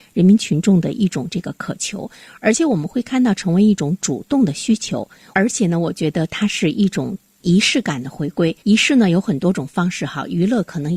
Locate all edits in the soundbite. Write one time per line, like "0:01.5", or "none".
0:08.6